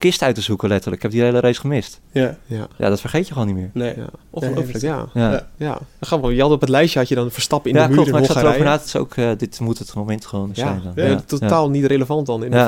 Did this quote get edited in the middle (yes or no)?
yes